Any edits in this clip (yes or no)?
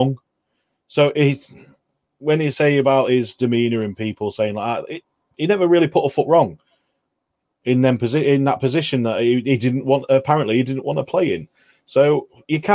no